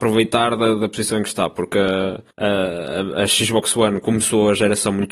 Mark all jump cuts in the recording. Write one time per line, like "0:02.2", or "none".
0:02.3